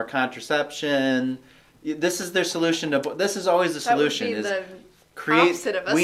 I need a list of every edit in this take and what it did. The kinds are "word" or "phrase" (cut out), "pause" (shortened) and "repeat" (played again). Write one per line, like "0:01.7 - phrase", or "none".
none